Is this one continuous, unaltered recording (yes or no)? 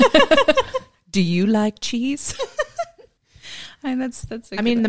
yes